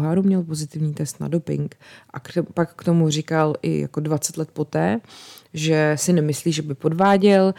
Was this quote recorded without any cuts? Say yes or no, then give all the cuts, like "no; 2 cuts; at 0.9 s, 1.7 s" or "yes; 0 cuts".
yes; 0 cuts